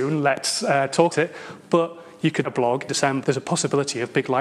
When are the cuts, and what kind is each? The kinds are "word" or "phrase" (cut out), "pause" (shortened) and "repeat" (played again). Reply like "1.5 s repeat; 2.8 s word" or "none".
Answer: 1.1 s word; 2.4 s word; 2.9 s word; 3.2 s word